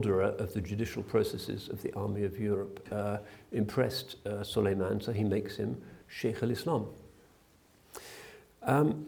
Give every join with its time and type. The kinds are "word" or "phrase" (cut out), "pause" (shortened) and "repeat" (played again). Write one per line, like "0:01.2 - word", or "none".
0:06.0 - pause

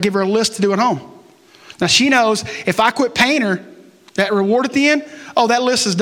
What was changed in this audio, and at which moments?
none

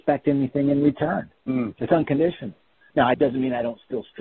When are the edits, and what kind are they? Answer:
0:01.4 - pause
0:03.1 - word

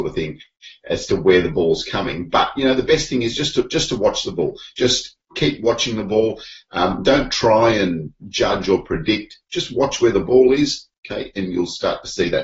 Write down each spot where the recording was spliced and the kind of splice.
none

